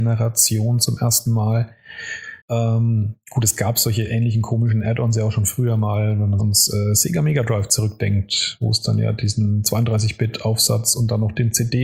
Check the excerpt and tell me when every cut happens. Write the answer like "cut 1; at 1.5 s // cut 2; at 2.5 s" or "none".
cut 1; at 2.4 s // cut 2; at 6.4 s